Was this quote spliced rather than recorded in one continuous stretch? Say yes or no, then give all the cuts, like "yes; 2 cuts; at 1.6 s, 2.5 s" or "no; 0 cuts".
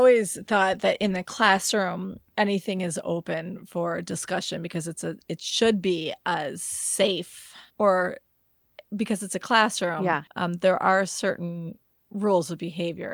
yes; 3 cuts; at 2.3 s, 7.7 s, 10.3 s